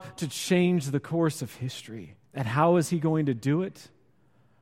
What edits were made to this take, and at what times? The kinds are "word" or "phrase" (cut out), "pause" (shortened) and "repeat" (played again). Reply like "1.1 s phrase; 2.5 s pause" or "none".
2.3 s pause